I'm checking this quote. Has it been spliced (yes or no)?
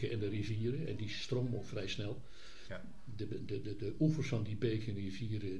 no